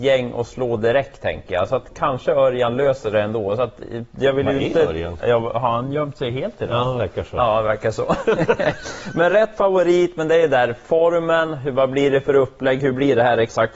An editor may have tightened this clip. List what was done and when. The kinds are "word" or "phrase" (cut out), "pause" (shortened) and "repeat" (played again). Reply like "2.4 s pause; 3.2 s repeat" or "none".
none